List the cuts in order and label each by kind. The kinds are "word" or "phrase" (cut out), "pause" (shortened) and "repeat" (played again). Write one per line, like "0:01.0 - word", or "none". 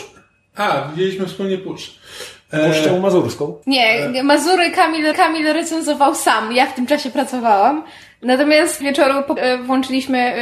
0:03.6 - pause
0:05.1 - repeat
0:08.8 - phrase
0:09.4 - word

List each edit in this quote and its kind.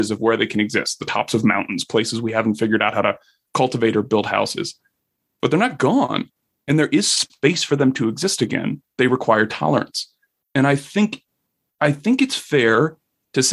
none

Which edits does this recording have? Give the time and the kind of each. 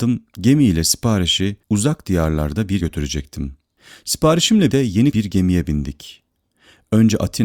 0:01.6 - pause
0:02.8 - word
0:04.7 - word
0:05.1 - word

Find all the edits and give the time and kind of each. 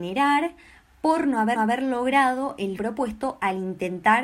0:01.6 - repeat
0:02.8 - word

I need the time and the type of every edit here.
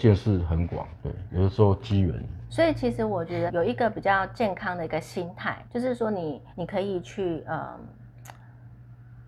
0:01.0 - word
0:02.5 - word
0:03.5 - word
0:05.7 - pause
0:06.5 - pause

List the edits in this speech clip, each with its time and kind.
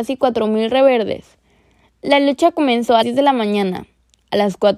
0:03.0 - word

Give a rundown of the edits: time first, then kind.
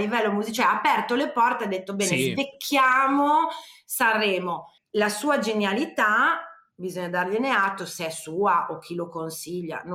0:04.8 - pause

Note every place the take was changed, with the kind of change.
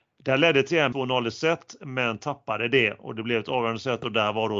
0:00.9 - word

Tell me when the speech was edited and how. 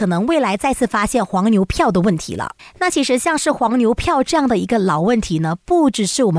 0:02.6 - pause

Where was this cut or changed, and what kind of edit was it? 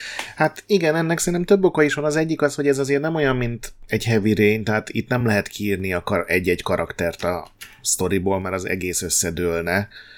none

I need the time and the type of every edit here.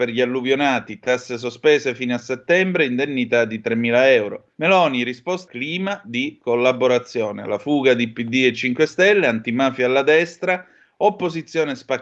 0:04.5 - pause
0:05.5 - word

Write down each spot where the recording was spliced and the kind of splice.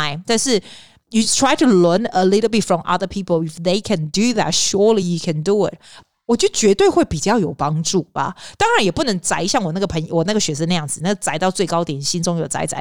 none

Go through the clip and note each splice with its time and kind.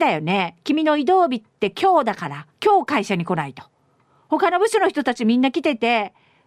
0:02.5 - pause

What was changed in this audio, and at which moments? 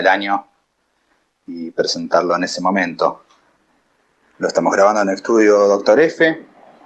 none

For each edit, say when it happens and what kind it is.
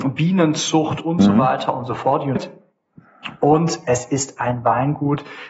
0:02.4 - word

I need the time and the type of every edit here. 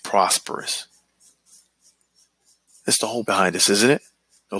0:03.3 - word

